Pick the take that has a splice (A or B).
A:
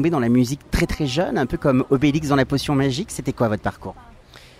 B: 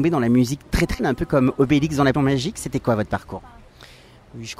B